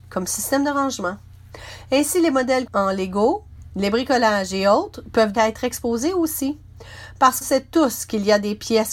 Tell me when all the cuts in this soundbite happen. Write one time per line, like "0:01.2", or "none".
0:02.7
0:05.3
0:07.4